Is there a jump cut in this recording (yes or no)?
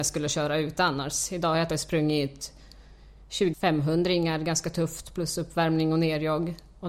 yes